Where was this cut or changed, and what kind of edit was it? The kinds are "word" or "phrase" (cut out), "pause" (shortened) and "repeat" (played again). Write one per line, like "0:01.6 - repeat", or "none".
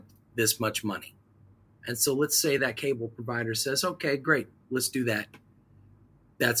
none